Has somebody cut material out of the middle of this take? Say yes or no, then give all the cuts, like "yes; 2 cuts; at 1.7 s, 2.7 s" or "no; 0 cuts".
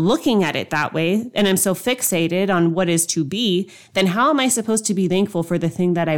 no; 0 cuts